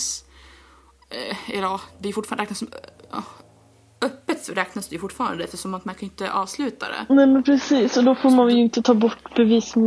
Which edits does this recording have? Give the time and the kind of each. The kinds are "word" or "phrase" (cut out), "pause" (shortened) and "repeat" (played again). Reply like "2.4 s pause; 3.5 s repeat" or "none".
none

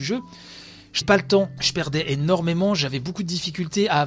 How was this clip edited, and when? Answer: 1.0 s word

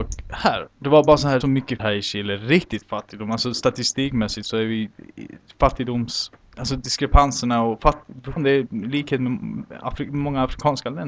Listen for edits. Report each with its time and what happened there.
1.4 s word; 1.8 s word; 8.4 s word

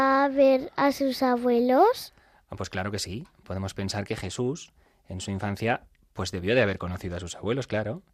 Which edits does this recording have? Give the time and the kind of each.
none

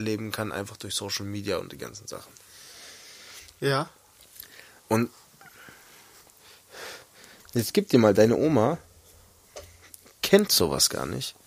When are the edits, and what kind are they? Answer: none

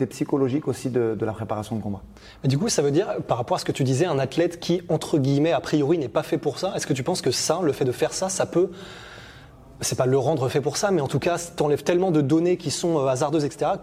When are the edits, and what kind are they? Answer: none

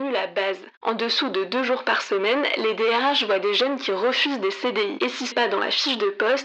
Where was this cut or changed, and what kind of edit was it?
5.3 s word

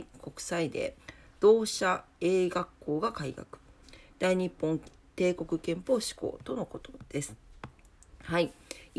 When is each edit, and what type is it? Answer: 1.0 s pause

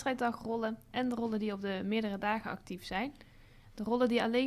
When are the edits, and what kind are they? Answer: none

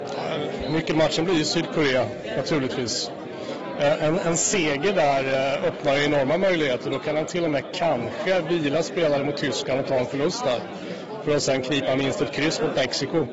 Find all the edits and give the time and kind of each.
none

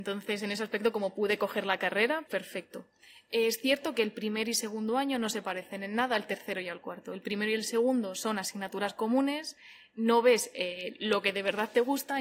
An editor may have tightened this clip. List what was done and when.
2.3 s word

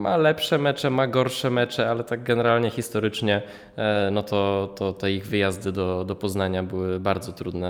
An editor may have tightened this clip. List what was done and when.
none

